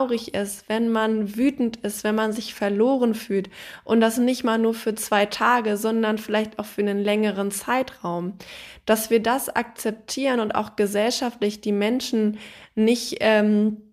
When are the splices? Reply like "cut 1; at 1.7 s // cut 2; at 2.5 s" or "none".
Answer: none